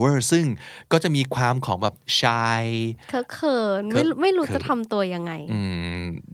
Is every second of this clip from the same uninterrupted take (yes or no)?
yes